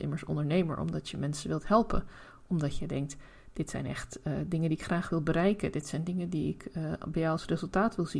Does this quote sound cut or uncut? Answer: uncut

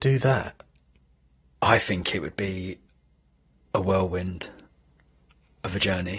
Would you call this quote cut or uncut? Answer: uncut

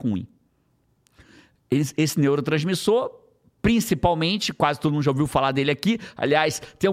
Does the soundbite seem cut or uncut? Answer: uncut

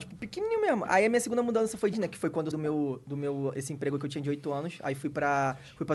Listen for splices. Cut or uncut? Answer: cut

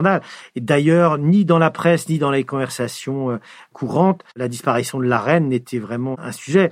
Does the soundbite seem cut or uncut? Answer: cut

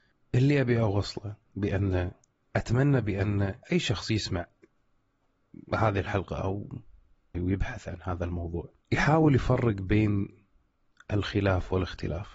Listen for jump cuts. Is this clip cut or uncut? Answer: cut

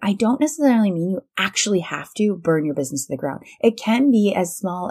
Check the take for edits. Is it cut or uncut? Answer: uncut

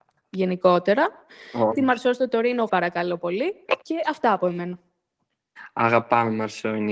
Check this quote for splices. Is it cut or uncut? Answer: cut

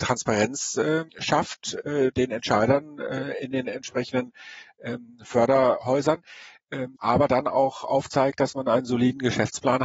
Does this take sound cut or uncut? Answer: cut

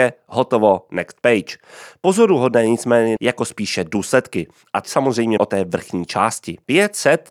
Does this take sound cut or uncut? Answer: cut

